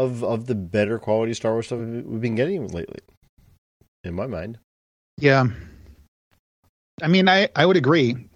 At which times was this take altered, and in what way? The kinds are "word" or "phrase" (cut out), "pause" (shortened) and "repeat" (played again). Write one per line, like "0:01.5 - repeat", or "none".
none